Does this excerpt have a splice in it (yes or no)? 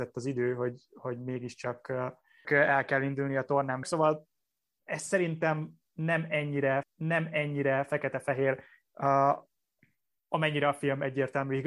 yes